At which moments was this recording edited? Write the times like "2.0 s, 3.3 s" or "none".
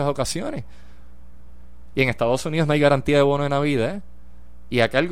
none